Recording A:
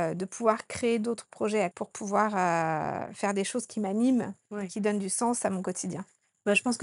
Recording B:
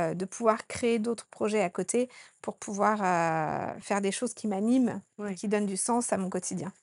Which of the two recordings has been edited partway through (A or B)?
A